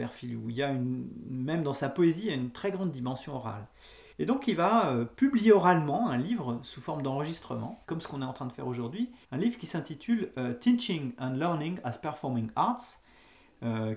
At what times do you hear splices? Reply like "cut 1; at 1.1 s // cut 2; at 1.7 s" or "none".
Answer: cut 1; at 4.1 s // cut 2; at 7.8 s // cut 3; at 9.2 s